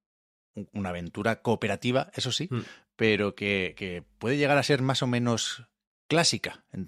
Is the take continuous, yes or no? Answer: yes